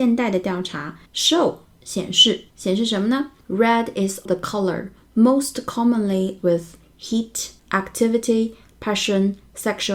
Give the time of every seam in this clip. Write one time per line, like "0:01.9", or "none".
0:01.1
0:02.5
0:03.4
0:04.3
0:06.4
0:07.6